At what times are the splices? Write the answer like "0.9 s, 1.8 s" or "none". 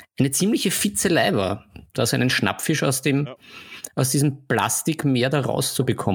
none